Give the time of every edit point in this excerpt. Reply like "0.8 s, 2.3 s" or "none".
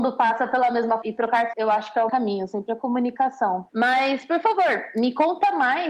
1.0 s, 1.5 s, 2.1 s, 3.7 s

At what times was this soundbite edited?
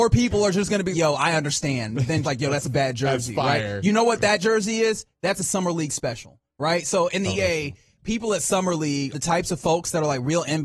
0.9 s, 2.2 s, 7.3 s, 9.1 s

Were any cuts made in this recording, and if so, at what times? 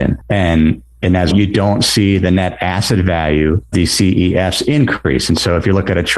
1.3 s, 3.7 s

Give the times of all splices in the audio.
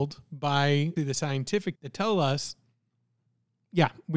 1.0 s, 1.7 s

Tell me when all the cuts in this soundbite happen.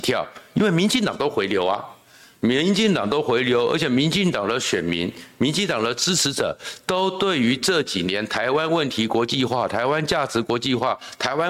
none

